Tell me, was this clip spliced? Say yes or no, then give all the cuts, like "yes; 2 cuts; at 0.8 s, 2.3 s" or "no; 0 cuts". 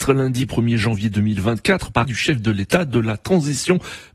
yes; 1 cut; at 2.0 s